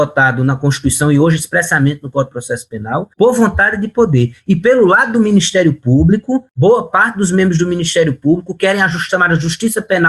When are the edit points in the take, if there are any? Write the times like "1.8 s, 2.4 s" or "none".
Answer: 3.1 s

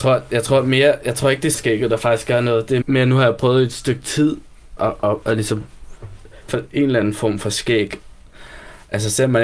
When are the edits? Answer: 1.5 s, 2.8 s, 4.8 s, 6.5 s

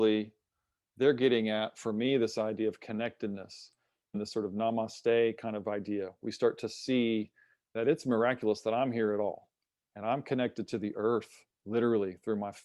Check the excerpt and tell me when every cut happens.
none

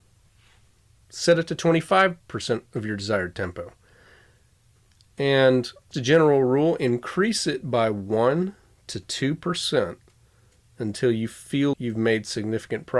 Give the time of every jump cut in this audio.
5.9 s, 11.7 s

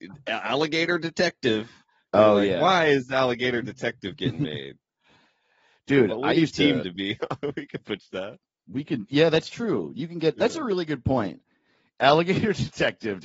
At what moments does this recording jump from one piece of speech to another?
6.8 s

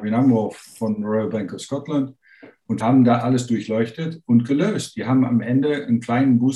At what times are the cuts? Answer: 2.8 s

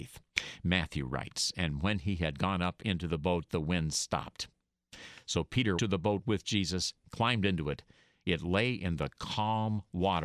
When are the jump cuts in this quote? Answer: 5.8 s

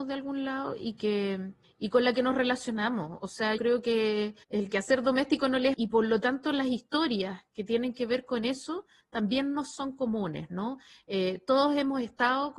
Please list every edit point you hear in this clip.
1.6 s, 3.6 s, 4.4 s, 5.7 s

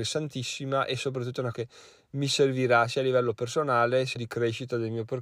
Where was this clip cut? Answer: 1.5 s, 4.2 s

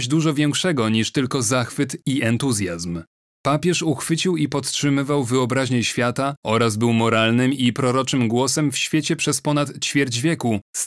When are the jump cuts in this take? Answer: none

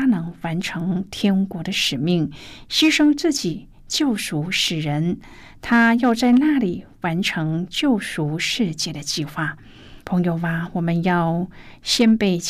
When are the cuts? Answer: 10.0 s

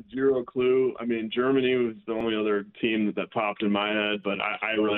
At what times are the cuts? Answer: 2.7 s

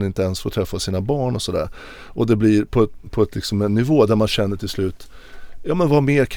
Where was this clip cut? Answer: none

